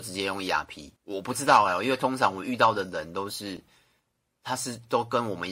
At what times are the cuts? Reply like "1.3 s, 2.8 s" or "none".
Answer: 1.0 s